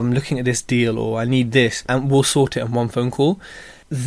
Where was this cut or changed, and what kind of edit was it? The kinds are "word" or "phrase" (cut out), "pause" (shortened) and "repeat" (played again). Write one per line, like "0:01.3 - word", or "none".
none